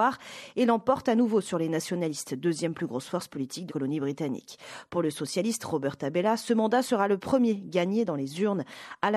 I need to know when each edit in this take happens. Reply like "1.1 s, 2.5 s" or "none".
3.7 s